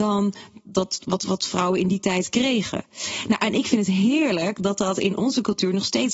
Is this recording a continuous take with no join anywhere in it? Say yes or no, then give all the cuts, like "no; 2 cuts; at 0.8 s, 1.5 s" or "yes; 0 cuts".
yes; 0 cuts